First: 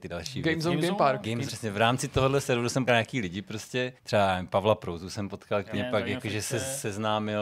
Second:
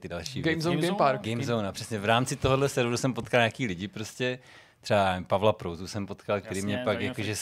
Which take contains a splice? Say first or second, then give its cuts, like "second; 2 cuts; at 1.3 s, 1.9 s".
first; 4 cuts; at 1.5 s, 2.9 s, 4.0 s, 5.7 s